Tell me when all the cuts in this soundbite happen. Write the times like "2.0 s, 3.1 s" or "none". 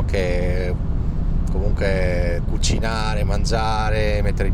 2.4 s